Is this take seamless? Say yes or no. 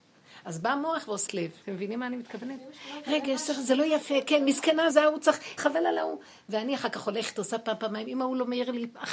no